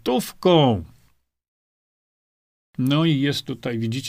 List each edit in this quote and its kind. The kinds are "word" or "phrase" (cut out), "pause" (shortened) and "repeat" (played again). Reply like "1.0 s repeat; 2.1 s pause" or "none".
none